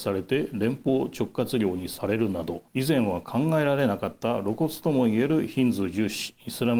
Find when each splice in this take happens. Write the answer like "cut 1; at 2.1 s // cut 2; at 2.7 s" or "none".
cut 1; at 2.7 s